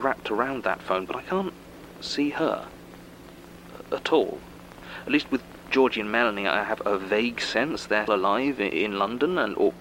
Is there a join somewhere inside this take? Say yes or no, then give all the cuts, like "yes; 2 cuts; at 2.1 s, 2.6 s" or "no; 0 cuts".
yes; 2 cuts; at 1.1 s, 8.1 s